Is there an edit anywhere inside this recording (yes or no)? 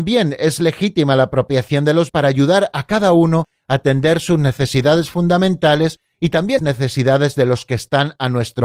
yes